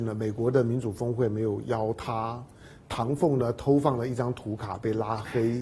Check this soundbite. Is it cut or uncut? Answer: uncut